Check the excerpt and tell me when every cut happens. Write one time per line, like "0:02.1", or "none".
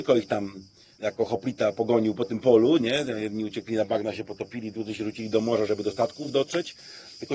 none

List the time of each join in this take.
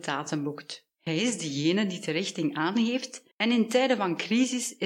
0:03.3

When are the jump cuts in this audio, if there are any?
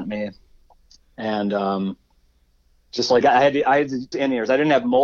0:03.2
0:04.1

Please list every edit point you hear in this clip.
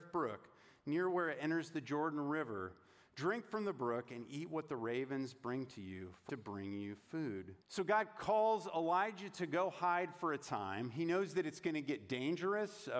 0:06.3
0:07.6

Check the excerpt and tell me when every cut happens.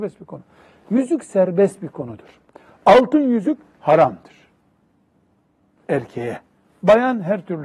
none

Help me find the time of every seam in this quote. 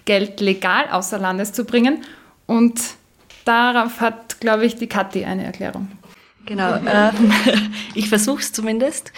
none

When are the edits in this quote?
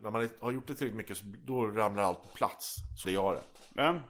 0:03.0

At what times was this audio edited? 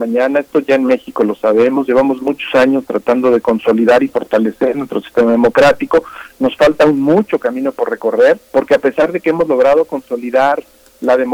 0:08.4

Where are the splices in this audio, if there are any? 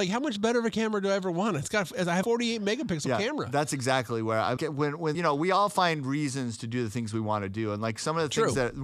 0:02.2
0:04.6
0:05.1

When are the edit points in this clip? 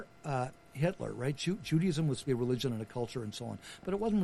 0:02.3

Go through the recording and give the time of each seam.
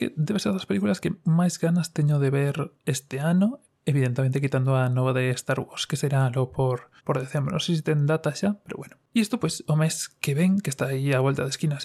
0:07.0
0:09.1

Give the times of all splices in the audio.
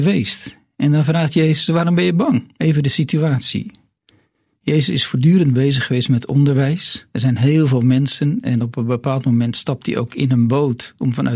0:02.6
0:07.1

